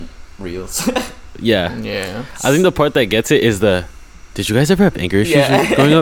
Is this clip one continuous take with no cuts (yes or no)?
yes